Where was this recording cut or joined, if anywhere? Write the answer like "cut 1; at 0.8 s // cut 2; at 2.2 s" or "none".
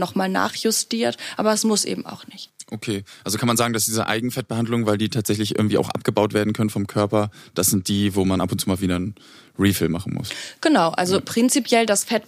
none